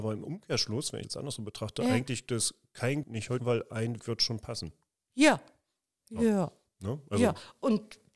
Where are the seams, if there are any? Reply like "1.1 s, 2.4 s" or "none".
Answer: 1.0 s, 2.3 s, 3.0 s, 3.4 s, 4.0 s